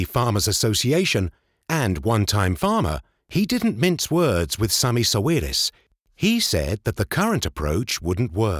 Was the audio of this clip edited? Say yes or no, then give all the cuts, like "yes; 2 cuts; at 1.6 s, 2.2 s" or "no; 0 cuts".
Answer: no; 0 cuts